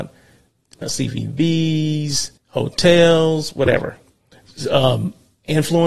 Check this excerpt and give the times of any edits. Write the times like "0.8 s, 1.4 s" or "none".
2.4 s